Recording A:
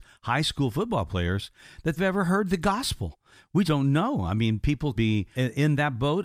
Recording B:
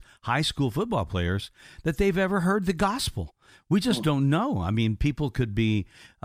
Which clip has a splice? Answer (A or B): A